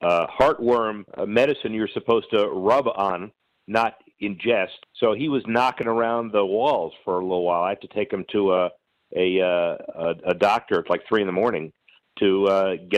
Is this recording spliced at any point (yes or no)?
yes